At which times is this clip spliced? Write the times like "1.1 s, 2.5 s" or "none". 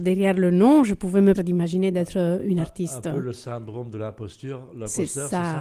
1.3 s